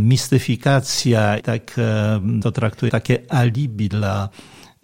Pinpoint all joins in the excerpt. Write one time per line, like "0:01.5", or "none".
0:01.4
0:02.4
0:02.9